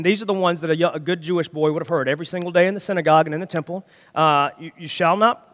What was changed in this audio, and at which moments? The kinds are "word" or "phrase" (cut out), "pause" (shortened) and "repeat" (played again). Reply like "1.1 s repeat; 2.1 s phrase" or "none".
none